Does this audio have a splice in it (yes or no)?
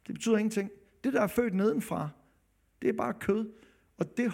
no